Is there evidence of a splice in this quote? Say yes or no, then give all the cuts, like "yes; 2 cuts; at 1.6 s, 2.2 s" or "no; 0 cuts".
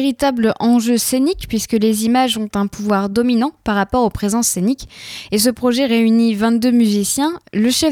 no; 0 cuts